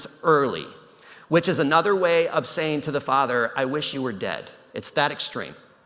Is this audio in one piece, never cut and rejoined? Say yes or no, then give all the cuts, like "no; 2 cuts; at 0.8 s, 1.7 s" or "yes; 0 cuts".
yes; 0 cuts